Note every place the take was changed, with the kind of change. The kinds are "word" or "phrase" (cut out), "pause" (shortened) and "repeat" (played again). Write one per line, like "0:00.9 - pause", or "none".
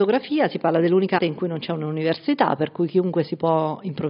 0:01.2 - word